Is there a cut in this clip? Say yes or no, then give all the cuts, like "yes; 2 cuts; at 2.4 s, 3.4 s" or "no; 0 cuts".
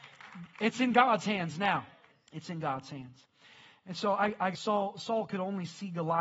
yes; 2 cuts; at 2.1 s, 4.5 s